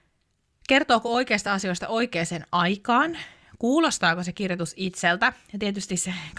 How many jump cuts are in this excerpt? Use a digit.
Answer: 0